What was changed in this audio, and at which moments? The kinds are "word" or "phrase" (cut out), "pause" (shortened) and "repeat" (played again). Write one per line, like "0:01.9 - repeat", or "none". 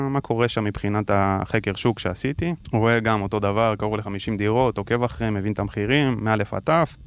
none